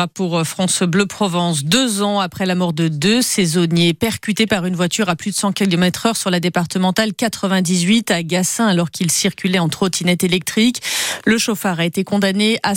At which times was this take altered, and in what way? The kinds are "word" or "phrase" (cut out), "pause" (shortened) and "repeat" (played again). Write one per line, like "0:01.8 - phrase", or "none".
none